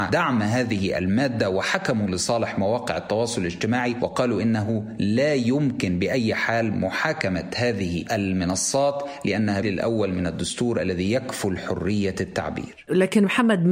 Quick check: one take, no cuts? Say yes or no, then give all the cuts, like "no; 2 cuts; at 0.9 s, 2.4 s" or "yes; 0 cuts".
no; 1 cut; at 9.6 s